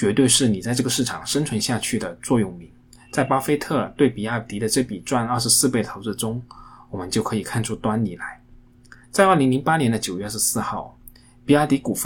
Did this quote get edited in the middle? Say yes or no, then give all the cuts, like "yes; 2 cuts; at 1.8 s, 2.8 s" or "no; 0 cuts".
yes; 2 cuts; at 2.9 s, 9.0 s